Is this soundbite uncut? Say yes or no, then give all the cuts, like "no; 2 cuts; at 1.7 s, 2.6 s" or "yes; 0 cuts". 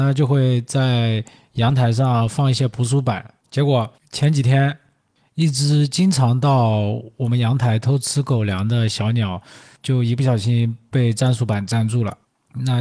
no; 1 cut; at 3.4 s